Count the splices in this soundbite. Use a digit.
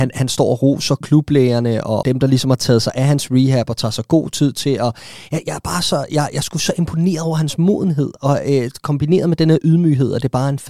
2